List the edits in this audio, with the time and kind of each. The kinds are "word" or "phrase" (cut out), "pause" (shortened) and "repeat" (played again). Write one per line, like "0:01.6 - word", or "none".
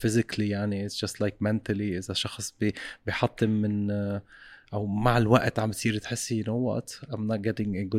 none